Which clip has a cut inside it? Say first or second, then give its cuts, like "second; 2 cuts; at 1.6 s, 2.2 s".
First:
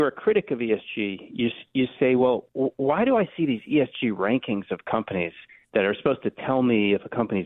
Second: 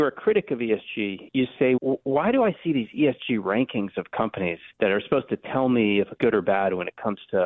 second; 4 cuts; at 1.3 s, 1.8 s, 4.7 s, 6.2 s